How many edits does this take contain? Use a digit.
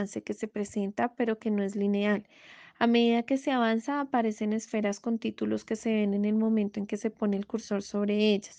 0